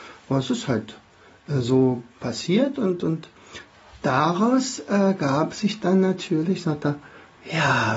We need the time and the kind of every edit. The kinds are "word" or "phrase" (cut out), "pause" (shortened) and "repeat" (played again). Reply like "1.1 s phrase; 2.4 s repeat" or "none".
none